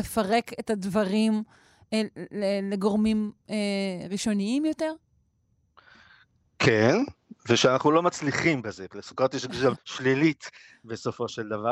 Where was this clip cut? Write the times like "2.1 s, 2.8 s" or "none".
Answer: 9.8 s

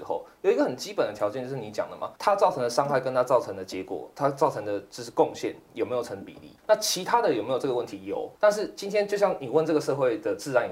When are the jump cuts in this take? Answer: 2.2 s, 6.6 s, 8.4 s

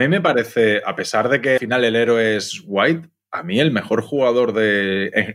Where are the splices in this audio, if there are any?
1.6 s

